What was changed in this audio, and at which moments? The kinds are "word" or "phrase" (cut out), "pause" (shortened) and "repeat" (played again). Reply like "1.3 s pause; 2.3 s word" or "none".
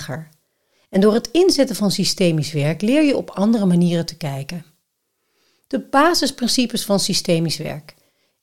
none